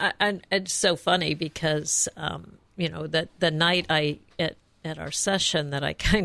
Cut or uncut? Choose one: uncut